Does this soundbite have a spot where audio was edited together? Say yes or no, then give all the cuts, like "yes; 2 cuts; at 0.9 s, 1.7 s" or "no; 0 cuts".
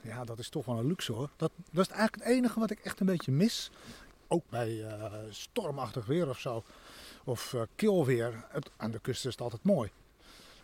no; 0 cuts